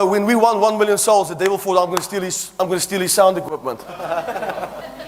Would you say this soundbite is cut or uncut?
uncut